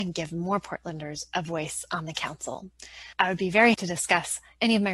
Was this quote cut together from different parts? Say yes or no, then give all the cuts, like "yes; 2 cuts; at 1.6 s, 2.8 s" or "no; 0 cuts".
yes; 2 cuts; at 3.1 s, 3.7 s